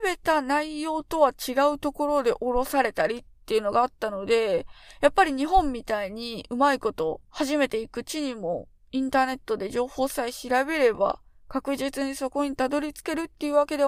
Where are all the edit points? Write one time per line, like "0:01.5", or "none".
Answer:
0:07.2